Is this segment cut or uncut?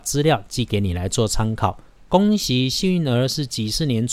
uncut